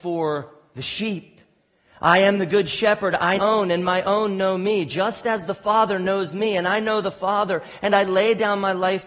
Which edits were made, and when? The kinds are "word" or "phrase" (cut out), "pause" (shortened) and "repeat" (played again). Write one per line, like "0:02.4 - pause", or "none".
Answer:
0:03.4 - phrase